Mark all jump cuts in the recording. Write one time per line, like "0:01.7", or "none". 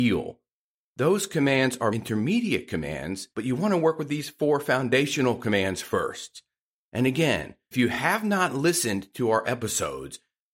0:01.9
0:03.3
0:07.7
0:09.4